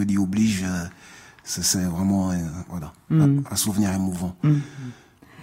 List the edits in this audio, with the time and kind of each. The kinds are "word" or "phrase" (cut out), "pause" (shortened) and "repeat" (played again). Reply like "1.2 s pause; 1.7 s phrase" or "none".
none